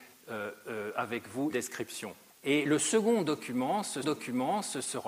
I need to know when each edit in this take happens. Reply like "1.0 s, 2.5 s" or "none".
1.5 s, 2.3 s, 4.0 s